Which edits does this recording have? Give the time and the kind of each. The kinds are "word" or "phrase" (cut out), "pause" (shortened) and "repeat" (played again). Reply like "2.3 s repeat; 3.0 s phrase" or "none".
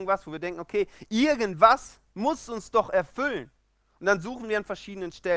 none